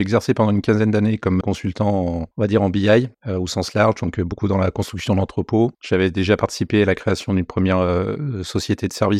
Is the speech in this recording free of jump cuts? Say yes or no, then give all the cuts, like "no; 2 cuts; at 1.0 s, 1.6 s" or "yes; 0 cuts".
no; 4 cuts; at 1.4 s, 2.3 s, 3.1 s, 5.7 s